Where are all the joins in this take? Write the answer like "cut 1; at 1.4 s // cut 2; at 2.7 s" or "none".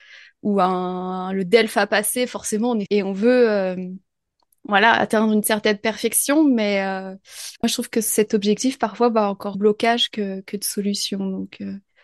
cut 1; at 2.9 s // cut 2; at 7.6 s // cut 3; at 9.5 s